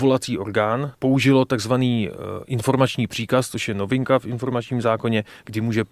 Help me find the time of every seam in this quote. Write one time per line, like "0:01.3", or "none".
none

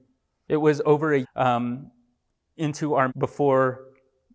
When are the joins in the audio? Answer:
0:01.2
0:03.1

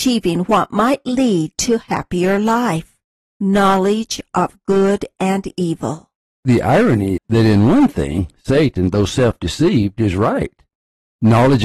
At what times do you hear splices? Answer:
0:07.2

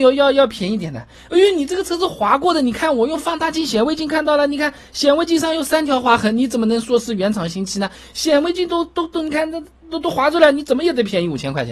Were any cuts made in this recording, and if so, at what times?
none

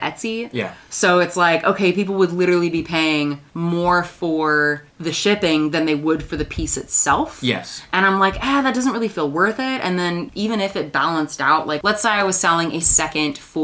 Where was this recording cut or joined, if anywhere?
none

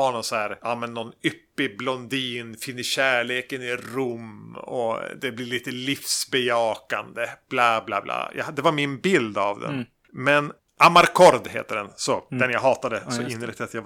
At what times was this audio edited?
none

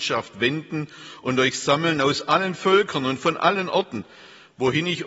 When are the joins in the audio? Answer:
none

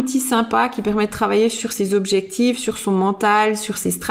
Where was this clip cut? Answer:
none

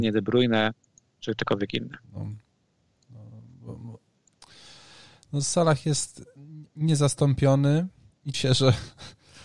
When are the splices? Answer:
0:02.0
0:06.7
0:08.3

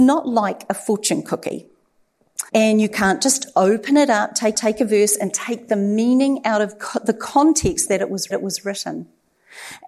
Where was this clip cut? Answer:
0:02.5
0:04.5
0:08.3

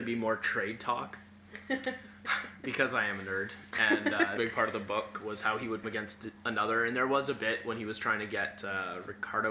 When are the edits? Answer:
0:04.4
0:05.8

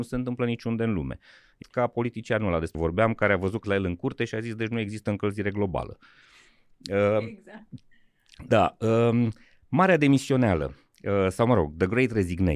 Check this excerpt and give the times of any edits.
0:01.6
0:02.7
0:03.6

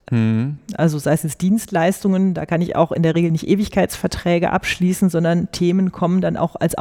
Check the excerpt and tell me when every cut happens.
none

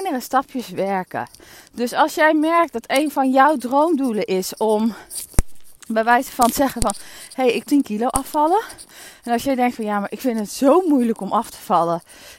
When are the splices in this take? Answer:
0:05.8
0:07.6

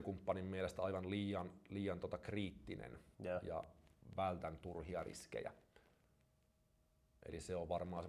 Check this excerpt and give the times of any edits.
0:03.1

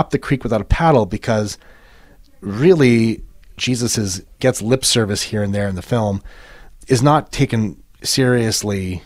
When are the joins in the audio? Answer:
none

